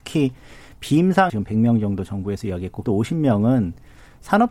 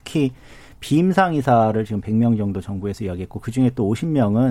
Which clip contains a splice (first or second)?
first